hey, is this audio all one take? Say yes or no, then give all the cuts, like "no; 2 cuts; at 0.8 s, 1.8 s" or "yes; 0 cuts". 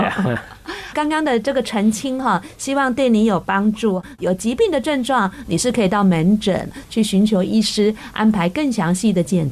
no; 1 cut; at 0.9 s